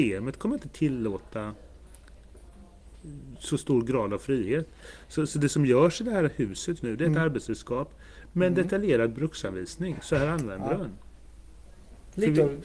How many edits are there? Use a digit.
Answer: 1